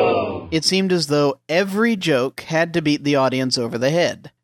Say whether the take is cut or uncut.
uncut